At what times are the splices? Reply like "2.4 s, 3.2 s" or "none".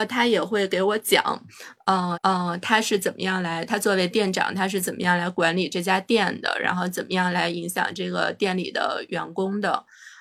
2.1 s